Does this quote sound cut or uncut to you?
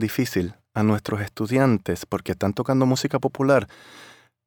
uncut